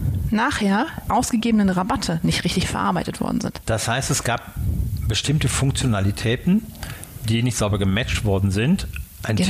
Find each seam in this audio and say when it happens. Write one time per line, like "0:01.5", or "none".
0:01.1